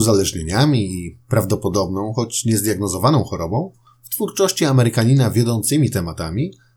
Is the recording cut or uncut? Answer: uncut